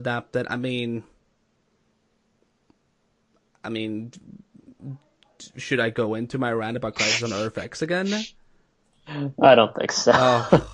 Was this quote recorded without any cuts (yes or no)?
yes